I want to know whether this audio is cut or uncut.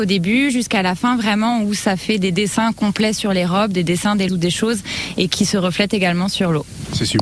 cut